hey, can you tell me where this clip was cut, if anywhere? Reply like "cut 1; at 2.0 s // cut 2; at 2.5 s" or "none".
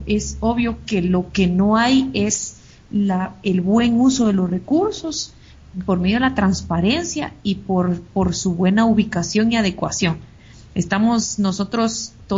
none